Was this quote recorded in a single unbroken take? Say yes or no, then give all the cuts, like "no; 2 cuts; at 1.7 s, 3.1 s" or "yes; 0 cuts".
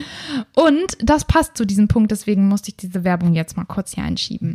yes; 0 cuts